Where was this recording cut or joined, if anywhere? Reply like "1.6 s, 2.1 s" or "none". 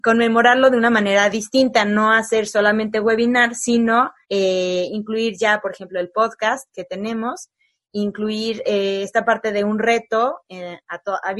4.2 s